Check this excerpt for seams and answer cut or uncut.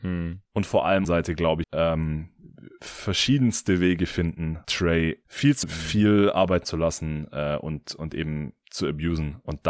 cut